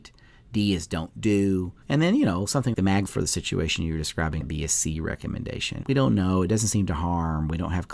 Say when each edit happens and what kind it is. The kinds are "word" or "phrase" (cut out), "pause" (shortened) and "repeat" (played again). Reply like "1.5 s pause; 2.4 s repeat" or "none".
1.8 s pause; 2.7 s word; 3.1 s word; 4.4 s word; 5.8 s word